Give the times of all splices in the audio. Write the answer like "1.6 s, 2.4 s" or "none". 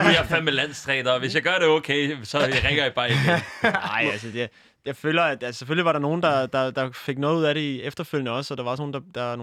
none